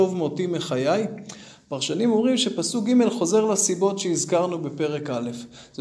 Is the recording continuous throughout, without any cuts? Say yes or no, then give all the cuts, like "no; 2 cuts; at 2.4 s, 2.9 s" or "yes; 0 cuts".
yes; 0 cuts